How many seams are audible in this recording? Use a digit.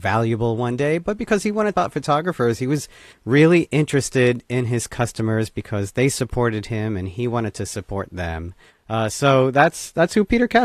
1